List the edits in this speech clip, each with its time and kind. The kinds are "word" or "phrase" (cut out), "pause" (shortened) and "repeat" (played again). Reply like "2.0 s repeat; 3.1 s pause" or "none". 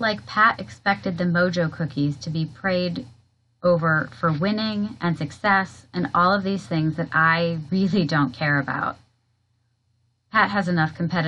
none